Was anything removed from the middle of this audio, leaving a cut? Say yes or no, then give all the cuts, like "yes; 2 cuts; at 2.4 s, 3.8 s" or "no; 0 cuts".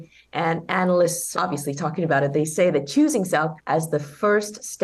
yes; 2 cuts; at 1.3 s, 3.6 s